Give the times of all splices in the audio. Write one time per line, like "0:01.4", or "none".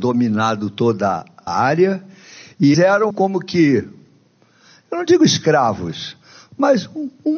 0:01.5
0:02.7
0:03.1